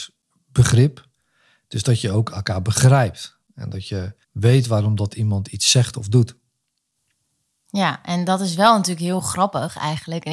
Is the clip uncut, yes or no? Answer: no